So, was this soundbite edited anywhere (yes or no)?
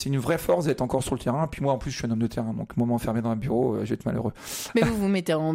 no